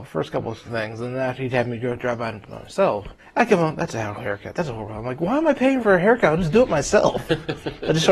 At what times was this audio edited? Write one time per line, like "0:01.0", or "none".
0:03.2
0:04.2
0:05.8